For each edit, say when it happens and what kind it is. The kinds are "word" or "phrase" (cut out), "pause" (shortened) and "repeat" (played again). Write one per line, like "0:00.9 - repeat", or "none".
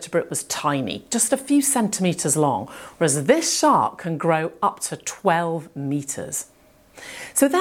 none